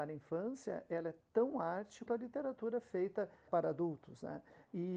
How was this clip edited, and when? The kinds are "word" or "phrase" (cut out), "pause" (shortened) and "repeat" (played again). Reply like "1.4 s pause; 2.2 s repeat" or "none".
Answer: 2.1 s word; 3.5 s word